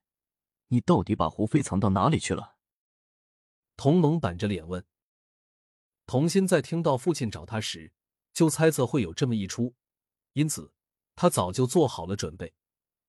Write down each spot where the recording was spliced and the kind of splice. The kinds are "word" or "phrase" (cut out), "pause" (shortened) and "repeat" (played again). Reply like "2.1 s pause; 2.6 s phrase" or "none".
none